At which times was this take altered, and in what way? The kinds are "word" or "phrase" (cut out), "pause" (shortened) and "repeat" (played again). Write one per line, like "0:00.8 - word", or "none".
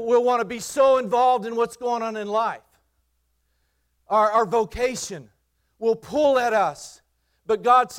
none